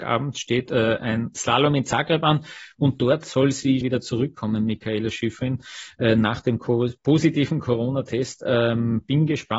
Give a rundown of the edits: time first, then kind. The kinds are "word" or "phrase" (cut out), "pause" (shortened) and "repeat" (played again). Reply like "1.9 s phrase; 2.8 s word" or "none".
3.8 s word